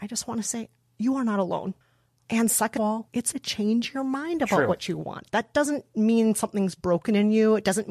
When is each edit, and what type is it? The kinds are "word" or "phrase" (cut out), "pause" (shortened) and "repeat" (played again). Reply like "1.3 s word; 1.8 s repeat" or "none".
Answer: 2.8 s word; 3.3 s word